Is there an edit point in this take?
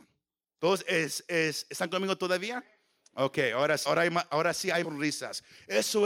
yes; 2 cuts; at 3.9 s, 4.8 s

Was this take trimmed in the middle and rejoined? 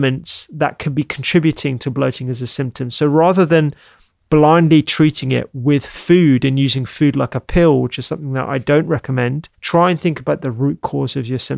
yes; 1 cut; at 9.5 s

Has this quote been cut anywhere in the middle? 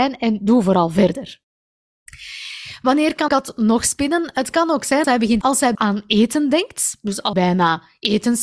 yes; 5 cuts; at 3.3 s, 5.0 s, 5.4 s, 5.7 s, 7.3 s

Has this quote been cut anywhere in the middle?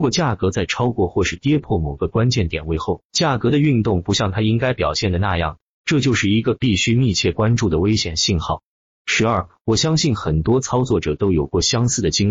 no; 0 cuts

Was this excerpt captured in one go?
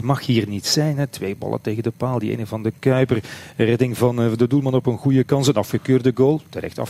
yes; 0 cuts

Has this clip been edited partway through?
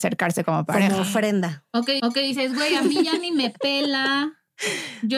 yes; 1 cut; at 2.0 s

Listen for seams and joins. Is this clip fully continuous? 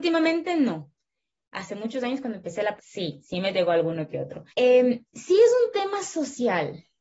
no; 2 cuts; at 2.8 s, 4.5 s

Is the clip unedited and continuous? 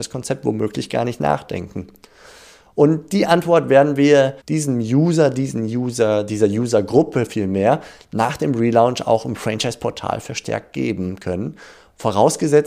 no; 1 cut; at 4.4 s

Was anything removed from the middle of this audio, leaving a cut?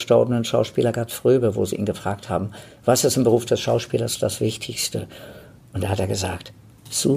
no; 0 cuts

